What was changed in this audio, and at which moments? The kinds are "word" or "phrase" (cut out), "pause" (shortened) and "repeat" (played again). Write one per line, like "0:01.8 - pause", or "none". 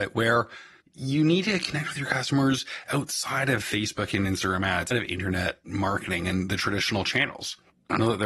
0:04.9 - word

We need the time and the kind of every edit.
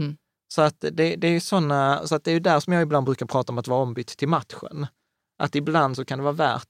none

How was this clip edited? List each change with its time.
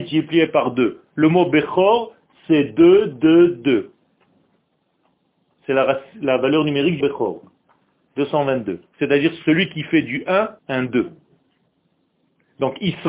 0:07.0 - word
0:10.6 - pause

